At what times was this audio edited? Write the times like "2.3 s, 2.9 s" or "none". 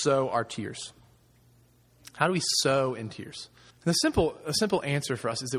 3.7 s